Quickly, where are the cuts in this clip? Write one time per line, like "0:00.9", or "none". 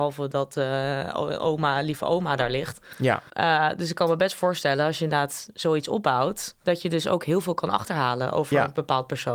0:03.3
0:06.6